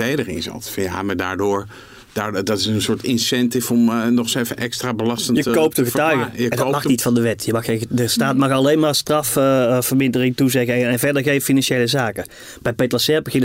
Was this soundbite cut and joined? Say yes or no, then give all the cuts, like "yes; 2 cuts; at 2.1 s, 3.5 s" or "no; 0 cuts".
no; 0 cuts